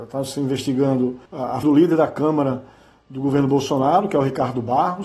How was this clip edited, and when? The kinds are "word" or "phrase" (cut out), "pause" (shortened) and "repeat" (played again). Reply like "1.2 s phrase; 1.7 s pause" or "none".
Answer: 1.3 s pause; 1.6 s word